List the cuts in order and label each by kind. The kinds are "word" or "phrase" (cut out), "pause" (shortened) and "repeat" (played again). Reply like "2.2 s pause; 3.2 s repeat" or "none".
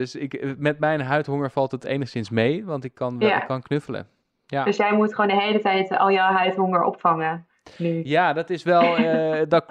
none